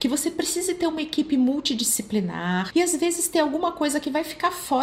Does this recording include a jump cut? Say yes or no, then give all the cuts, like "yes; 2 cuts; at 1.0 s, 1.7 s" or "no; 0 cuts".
no; 0 cuts